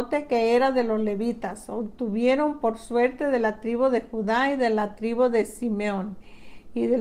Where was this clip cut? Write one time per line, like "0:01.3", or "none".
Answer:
none